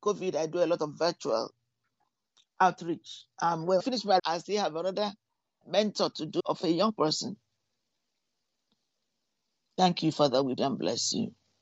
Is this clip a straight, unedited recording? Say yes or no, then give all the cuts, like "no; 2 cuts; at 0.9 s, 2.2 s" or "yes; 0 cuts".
no; 5 cuts; at 3.8 s, 4.2 s, 5.6 s, 6.4 s, 10.6 s